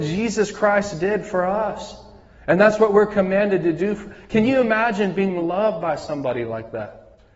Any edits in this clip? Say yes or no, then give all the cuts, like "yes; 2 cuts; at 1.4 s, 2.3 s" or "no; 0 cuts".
no; 0 cuts